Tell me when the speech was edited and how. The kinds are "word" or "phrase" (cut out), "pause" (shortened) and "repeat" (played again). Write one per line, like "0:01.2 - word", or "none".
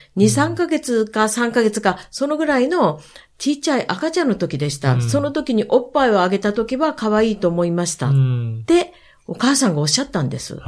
none